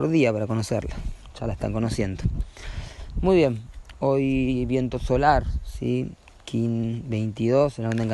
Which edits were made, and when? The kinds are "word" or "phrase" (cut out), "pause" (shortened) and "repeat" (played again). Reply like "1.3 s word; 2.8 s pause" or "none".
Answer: none